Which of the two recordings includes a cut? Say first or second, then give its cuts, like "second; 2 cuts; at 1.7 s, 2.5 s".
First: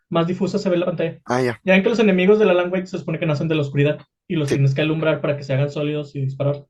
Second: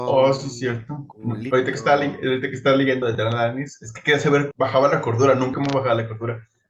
second; 3 cuts; at 3.0 s, 4.5 s, 5.5 s